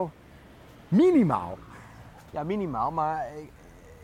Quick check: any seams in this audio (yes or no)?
no